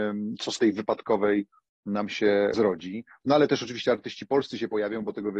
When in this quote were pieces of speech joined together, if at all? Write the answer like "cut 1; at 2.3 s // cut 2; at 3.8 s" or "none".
none